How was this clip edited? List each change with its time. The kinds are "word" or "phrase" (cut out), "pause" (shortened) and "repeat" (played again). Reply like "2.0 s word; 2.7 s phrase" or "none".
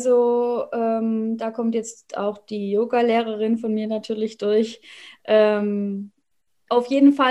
none